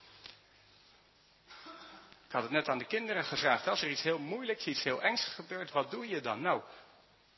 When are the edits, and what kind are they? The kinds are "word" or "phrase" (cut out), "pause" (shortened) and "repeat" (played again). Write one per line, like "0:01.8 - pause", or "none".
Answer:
none

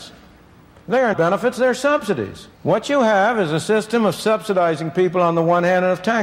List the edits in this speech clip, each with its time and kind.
0:01.1 - word
0:02.5 - pause

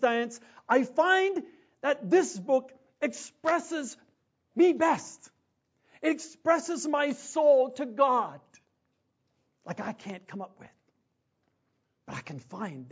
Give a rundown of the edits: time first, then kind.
none

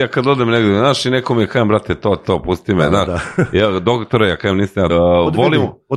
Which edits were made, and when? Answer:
0:02.2 - word
0:04.9 - phrase

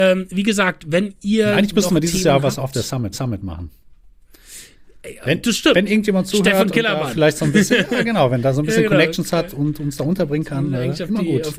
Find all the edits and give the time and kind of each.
0:03.1 - repeat

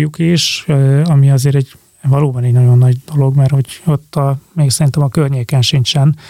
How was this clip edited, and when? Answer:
none

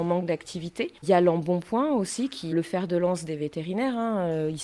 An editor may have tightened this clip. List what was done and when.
0:01.0 - pause
0:02.5 - word

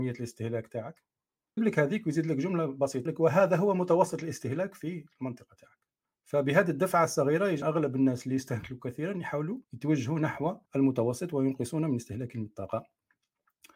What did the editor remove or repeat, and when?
0:01.6 - word
0:03.1 - word
0:06.0 - pause
0:07.6 - word
0:09.6 - pause
0:10.6 - pause

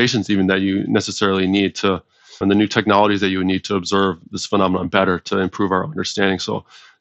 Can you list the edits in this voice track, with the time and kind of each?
0:02.4 - word

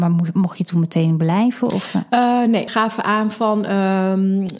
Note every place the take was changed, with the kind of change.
0:02.7 - word

